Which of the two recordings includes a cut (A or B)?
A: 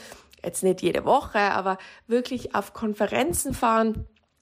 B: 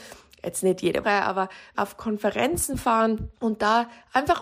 B